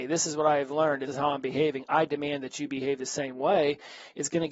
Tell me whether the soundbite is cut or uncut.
cut